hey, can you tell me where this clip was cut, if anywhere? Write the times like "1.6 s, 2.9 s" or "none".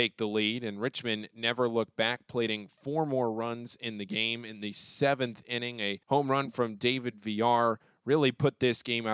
6.0 s